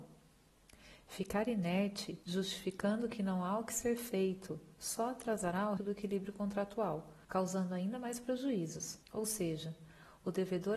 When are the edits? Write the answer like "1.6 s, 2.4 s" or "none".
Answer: 2.2 s, 5.8 s, 7.2 s, 9.0 s